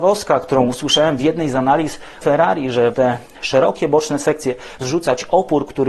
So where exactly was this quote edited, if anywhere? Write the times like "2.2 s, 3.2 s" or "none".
2.2 s, 2.9 s, 4.8 s